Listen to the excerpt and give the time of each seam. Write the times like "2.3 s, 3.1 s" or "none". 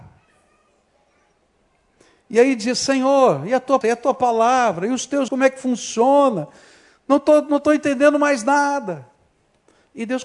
3.8 s, 5.3 s